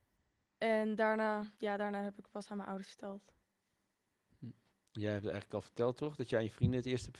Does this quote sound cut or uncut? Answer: cut